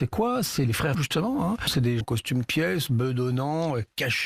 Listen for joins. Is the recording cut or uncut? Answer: cut